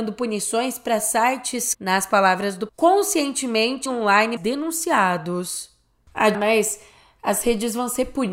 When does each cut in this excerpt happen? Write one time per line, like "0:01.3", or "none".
0:01.7
0:02.7
0:03.9
0:04.4
0:06.3